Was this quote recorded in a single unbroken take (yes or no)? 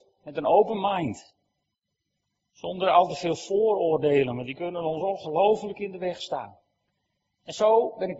yes